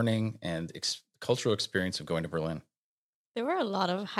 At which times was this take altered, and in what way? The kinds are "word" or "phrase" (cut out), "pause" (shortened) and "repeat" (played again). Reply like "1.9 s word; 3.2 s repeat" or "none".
none